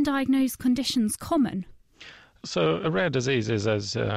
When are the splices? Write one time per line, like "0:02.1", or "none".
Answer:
none